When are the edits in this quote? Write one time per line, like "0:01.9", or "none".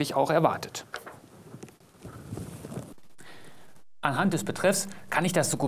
none